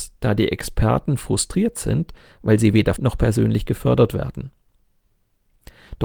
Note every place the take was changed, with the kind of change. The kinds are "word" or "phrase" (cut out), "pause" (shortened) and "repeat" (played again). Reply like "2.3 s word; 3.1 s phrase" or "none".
3.0 s word